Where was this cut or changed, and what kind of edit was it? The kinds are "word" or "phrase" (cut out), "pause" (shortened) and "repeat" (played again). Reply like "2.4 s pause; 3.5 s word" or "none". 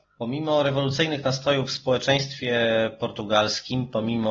none